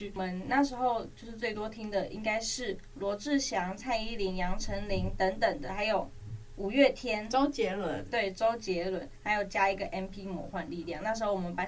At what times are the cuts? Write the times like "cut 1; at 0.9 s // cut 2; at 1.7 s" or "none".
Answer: none